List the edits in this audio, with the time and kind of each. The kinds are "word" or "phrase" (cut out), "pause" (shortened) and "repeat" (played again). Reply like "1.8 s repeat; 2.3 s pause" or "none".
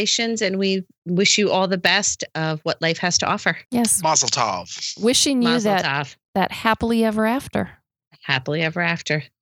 3.6 s pause